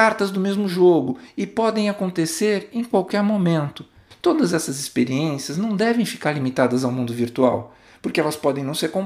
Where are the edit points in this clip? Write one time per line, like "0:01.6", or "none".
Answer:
none